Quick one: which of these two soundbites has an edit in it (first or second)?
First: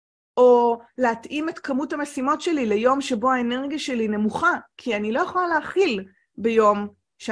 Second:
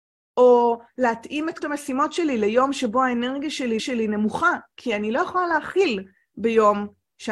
second